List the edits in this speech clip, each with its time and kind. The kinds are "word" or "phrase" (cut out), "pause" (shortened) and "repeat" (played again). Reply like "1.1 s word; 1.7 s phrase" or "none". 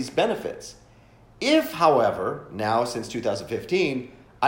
none